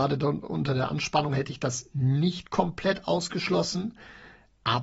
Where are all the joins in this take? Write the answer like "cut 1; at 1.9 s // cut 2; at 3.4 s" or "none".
none

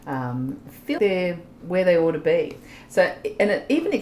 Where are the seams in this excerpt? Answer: cut 1; at 1.0 s

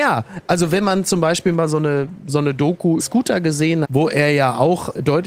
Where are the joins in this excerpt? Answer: cut 1; at 3.0 s // cut 2; at 3.8 s

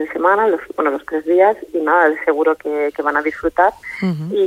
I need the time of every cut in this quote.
cut 1; at 1.7 s

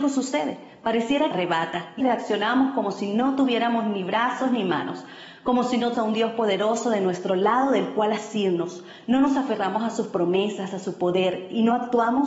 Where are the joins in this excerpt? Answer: cut 1; at 1.3 s // cut 2; at 2.0 s // cut 3; at 5.9 s

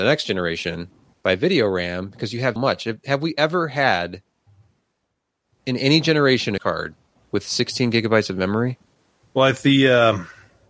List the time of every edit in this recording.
cut 1; at 1.1 s // cut 2; at 2.6 s // cut 3; at 6.6 s

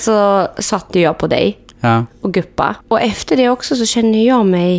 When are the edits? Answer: cut 1; at 2.8 s

